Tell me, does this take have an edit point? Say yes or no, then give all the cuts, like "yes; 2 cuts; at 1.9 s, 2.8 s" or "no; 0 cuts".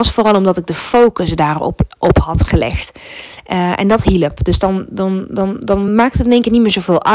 no; 0 cuts